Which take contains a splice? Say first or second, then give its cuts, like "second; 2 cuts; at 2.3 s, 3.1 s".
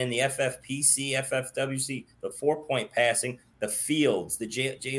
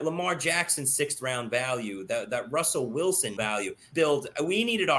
second; 2 cuts; at 3.4 s, 3.9 s